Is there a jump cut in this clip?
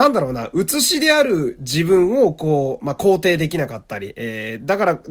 no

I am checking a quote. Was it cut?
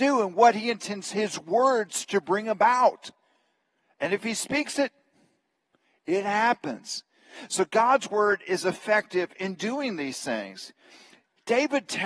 no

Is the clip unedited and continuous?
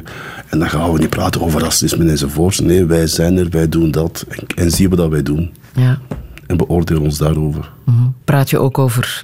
no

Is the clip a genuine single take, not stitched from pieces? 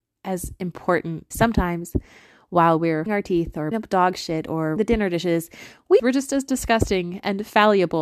no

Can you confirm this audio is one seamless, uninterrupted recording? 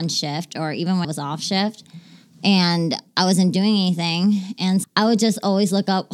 no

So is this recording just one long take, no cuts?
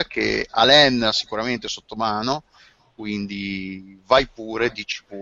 yes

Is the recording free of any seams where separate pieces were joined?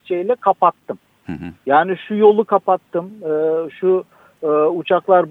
yes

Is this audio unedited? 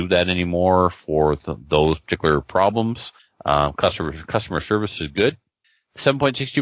yes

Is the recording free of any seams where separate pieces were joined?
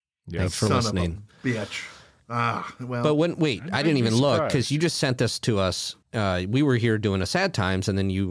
no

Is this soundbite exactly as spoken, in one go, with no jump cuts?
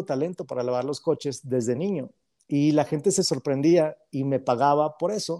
yes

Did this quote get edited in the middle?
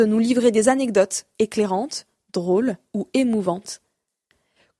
no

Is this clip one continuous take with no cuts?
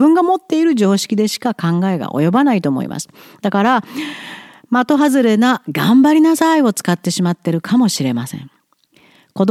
yes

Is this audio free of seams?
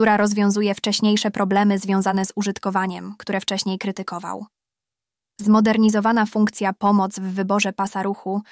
yes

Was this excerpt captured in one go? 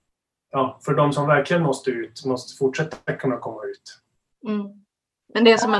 yes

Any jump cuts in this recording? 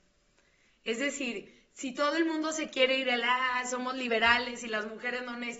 no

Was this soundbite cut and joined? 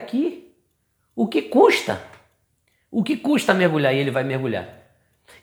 no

